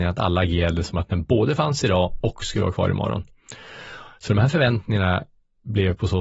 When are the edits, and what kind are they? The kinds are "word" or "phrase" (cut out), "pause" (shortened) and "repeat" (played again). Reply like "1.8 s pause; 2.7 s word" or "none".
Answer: none